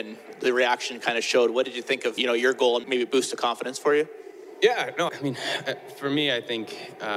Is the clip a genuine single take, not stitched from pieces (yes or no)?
no